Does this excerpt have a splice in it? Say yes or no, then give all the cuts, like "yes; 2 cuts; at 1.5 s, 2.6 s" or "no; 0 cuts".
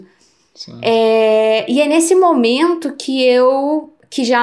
no; 0 cuts